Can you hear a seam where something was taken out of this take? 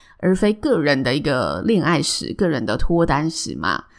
no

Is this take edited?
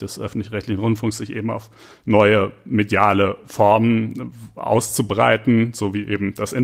no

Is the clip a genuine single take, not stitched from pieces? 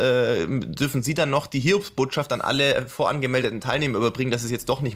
yes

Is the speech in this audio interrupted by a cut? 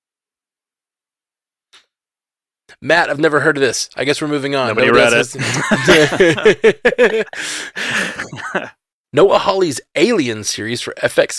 no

